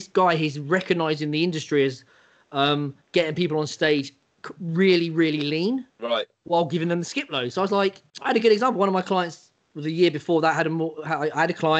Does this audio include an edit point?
yes; 3 cuts; at 3.0 s, 5.9 s, 8.1 s

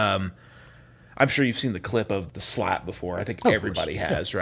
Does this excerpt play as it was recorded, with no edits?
no; 1 cut; at 2.3 s

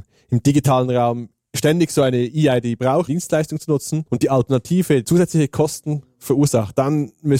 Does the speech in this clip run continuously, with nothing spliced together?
no; 3 cuts; at 3.1 s, 4.1 s, 5.0 s

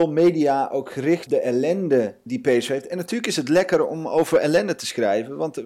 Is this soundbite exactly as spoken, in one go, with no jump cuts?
no; 2 cuts; at 1.3 s, 2.3 s

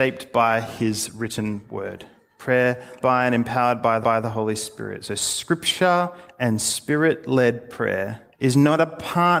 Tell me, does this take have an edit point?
yes; 3 cuts; at 3.0 s, 4.0 s, 8.3 s

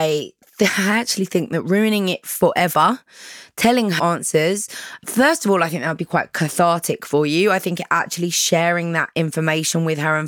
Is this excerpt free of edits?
no; 1 cut; at 4.0 s

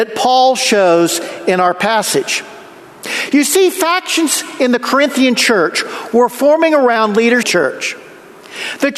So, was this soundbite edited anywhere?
yes; 1 cut; at 7.4 s

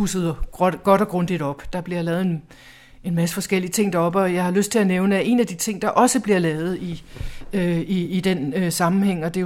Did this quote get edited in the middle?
no; 0 cuts

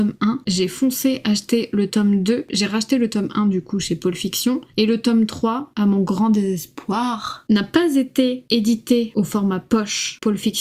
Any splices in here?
no; 0 cuts

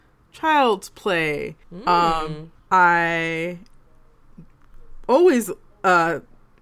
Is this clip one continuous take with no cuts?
no; 2 cuts; at 1.6 s, 2.6 s

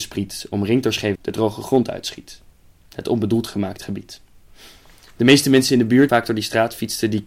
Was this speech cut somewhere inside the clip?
yes; 2 cuts; at 1.2 s, 6.1 s

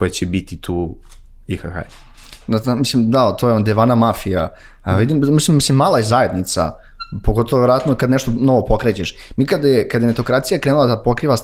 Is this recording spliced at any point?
no; 0 cuts

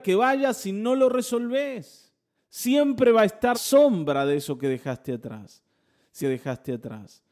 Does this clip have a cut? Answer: yes; 3 cuts; at 2.3 s, 3.5 s, 6.2 s

